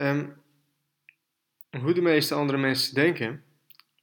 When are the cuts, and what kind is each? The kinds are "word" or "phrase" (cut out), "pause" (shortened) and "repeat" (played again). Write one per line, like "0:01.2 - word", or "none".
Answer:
none